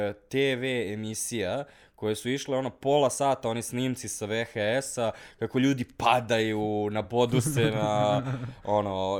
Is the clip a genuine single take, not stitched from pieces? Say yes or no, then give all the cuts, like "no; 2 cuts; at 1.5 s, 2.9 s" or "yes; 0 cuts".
yes; 0 cuts